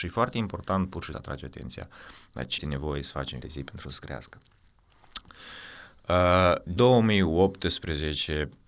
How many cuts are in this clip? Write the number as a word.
five